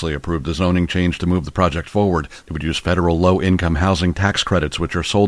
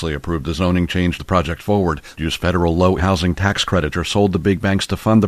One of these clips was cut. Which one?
second; 4 cuts; at 1.2 s, 2.2 s, 3.0 s, 3.9 s

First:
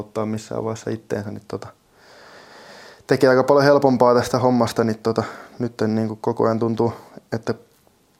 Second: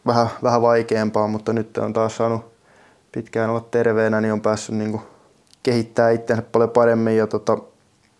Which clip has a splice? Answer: second; 1 cut; at 5.4 s

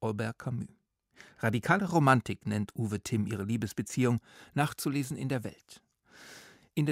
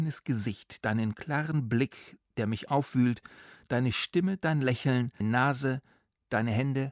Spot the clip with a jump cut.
second; 1 cut; at 5.2 s

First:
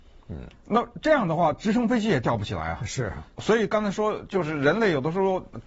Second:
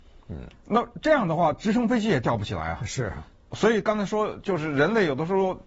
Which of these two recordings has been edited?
first; 1 cut; at 3.3 s

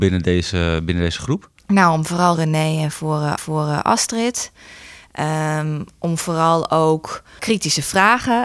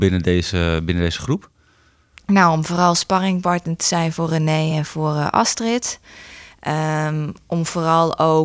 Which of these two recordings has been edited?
first; 4 cuts; at 1.6 s, 2.3 s, 3.4 s, 7.4 s

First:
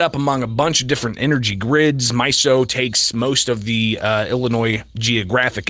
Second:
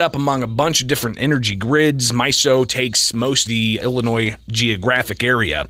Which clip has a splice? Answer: second; 2 cuts; at 3.5 s, 3.8 s

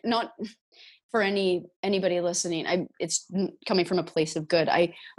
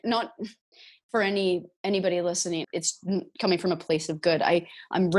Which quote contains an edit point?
second; 1 cut; at 2.6 s

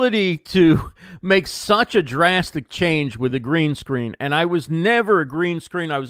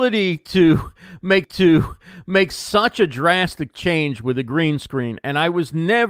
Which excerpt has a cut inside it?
second; 1 cut; at 1.4 s

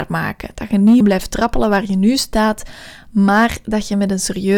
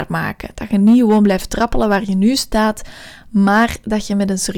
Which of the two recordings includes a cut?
first; 1 cut; at 1.0 s

